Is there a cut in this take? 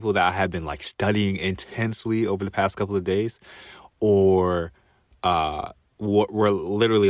no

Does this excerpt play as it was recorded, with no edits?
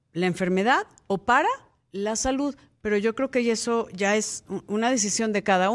yes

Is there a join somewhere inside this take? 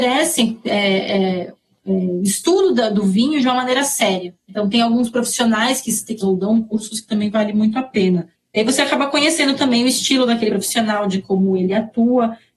yes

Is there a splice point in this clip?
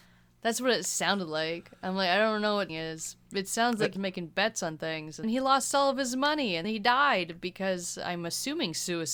yes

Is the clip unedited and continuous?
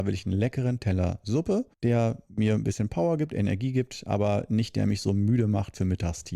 no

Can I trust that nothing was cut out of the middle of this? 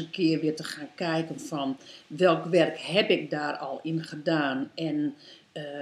yes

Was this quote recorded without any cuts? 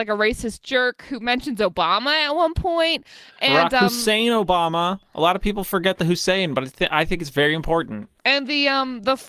no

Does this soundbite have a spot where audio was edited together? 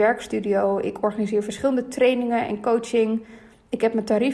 no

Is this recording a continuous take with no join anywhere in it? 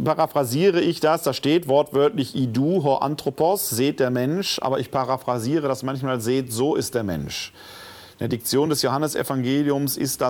yes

